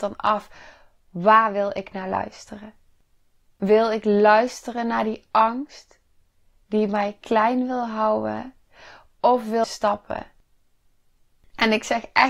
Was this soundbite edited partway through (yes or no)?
yes